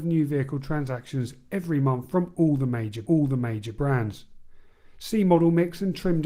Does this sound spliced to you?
yes; 1 cut; at 3.0 s

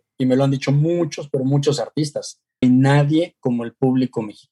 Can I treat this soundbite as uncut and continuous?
no; 1 cut; at 2.6 s

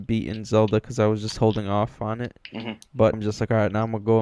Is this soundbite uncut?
no; 1 cut; at 3.1 s

